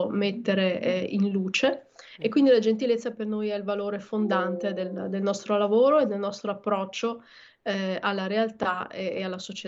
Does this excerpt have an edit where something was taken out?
no; 0 cuts

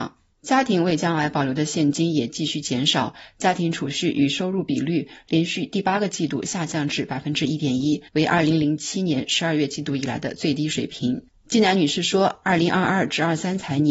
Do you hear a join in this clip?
yes; 1 cut; at 8.1 s

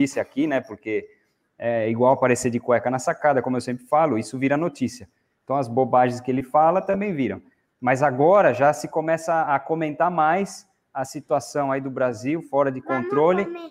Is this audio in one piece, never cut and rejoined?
yes; 0 cuts

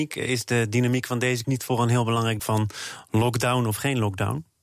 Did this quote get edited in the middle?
yes; 2 cuts; at 1.4 s, 2.4 s

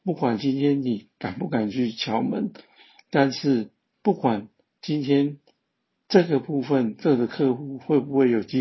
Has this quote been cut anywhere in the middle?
no; 0 cuts

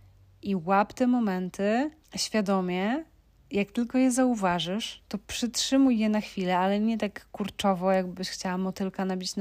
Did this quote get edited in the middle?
yes; 2 cuts; at 2.0 s, 5.2 s

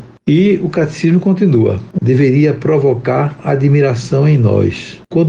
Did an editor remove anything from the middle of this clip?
yes; 1 cut; at 2.0 s

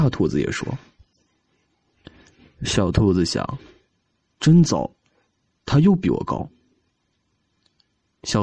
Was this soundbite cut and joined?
no; 0 cuts

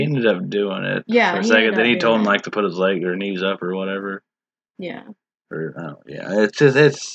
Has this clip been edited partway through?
no; 0 cuts

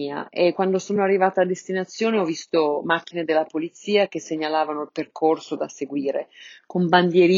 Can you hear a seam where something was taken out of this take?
no; 0 cuts

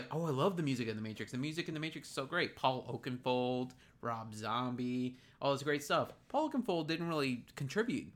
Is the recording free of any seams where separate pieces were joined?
yes; 0 cuts

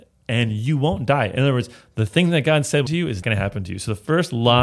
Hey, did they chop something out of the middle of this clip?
yes; 2 cuts; at 2.9 s, 3.2 s

